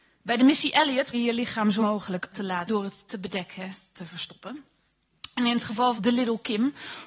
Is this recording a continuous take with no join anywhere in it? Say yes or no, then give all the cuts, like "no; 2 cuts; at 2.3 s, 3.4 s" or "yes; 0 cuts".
no; 6 cuts; at 1.1 s, 1.8 s, 2.3 s, 2.7 s, 3.9 s, 6.0 s